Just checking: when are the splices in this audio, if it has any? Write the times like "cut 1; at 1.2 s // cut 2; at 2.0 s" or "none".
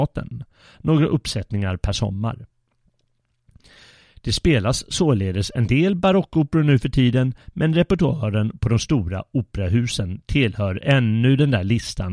none